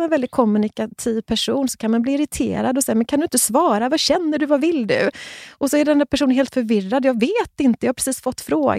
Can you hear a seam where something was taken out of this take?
no; 0 cuts

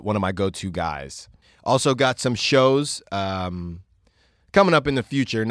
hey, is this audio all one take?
yes; 0 cuts

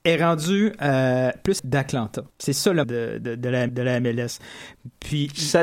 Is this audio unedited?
no; 4 cuts; at 1.6 s, 2.3 s, 2.8 s, 3.7 s

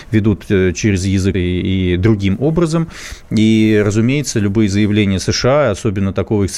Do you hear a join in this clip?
yes; 1 cut; at 1.3 s

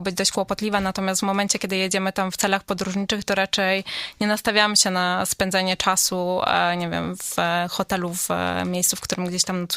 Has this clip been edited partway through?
no; 0 cuts

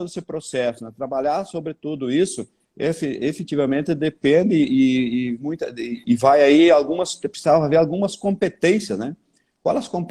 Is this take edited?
no; 0 cuts

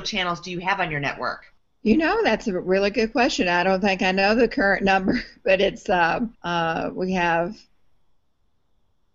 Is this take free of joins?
no; 2 cuts; at 1.6 s, 6.3 s

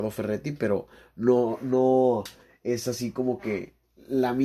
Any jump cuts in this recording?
no; 0 cuts

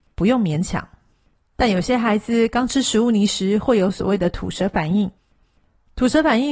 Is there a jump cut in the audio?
no; 0 cuts

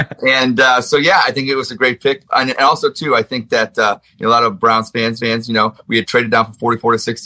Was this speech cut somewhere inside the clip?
yes; 1 cut; at 5.2 s

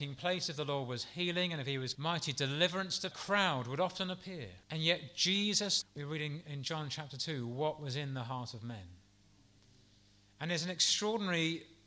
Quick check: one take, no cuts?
no; 4 cuts; at 1.9 s, 3.1 s, 4.6 s, 5.8 s

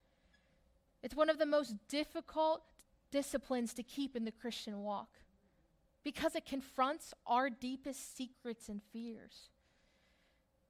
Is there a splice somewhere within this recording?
no; 0 cuts

